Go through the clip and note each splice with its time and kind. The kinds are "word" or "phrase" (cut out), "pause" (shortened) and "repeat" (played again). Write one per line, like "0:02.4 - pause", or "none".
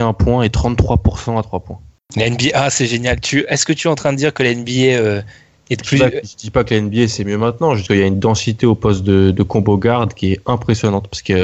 0:07.9 - word